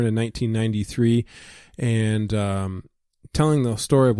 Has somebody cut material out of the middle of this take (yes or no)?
no